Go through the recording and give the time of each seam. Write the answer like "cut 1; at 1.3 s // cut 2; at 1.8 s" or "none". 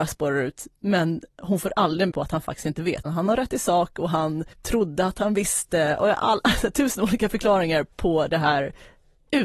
cut 1; at 2.1 s // cut 2; at 3.0 s // cut 3; at 4.5 s // cut 4; at 7.9 s